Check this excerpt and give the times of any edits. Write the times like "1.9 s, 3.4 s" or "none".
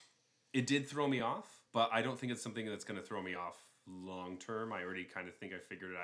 none